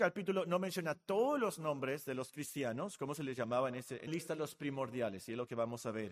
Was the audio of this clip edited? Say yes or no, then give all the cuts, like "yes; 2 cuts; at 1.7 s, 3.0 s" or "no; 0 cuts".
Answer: yes; 1 cut; at 4.1 s